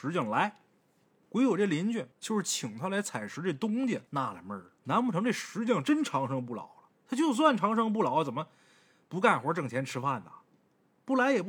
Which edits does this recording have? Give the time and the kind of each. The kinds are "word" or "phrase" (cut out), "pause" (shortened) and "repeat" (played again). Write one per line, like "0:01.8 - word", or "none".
0:01.1 - pause
0:02.1 - pause
0:04.1 - pause
0:04.8 - pause
0:06.9 - pause